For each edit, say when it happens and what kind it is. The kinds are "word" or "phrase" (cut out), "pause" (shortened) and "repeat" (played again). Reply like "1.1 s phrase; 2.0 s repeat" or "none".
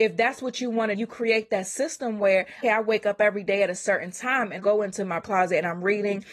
0.9 s phrase; 2.6 s word; 4.6 s word; 5.2 s word